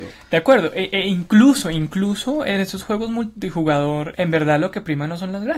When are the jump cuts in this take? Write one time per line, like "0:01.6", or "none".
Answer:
0:04.1